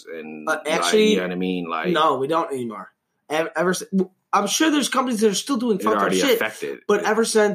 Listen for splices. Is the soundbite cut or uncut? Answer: uncut